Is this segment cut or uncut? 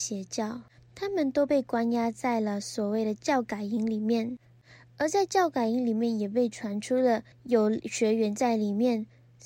cut